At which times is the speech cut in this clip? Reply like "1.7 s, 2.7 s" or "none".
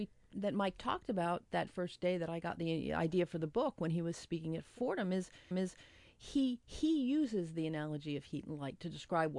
1.7 s, 5.5 s